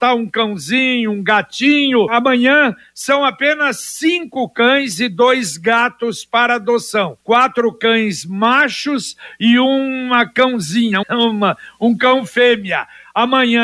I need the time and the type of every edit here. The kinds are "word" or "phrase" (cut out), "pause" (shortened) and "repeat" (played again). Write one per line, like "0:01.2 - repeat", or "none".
0:02.1 - word
0:07.2 - pause
0:11.0 - word

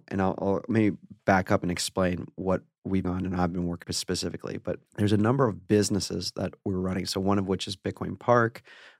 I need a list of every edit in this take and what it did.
0:03.0 - phrase
0:03.8 - word
0:04.9 - pause

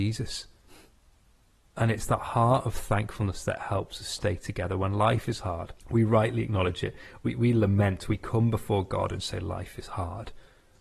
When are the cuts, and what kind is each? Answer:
0:05.8 - pause

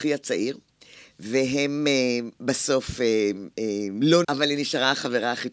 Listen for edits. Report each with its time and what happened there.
0:04.2 - word

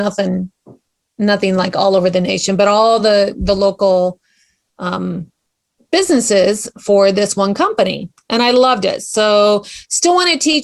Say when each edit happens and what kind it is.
none

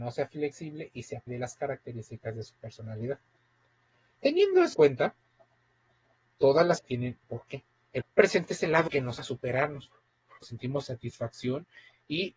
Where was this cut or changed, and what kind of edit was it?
0:01.3 - word
0:04.7 - word
0:06.8 - word
0:07.2 - word
0:08.0 - word
0:08.9 - word
0:09.2 - word
0:10.4 - word

